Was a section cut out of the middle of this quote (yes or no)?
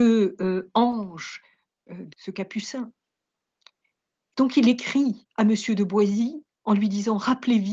yes